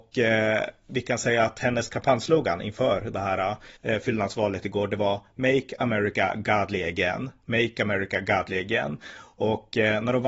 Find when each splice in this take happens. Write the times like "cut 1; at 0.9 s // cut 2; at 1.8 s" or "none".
cut 1; at 3.8 s

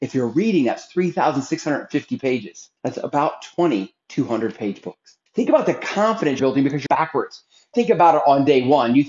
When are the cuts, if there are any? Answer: cut 1; at 2.8 s // cut 2; at 4.0 s // cut 3; at 5.3 s // cut 4; at 6.4 s // cut 5; at 6.9 s // cut 6; at 7.7 s

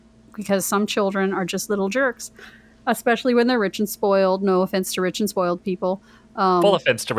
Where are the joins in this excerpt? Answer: none

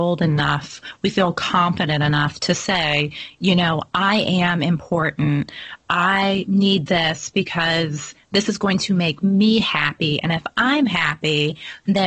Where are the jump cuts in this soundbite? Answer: none

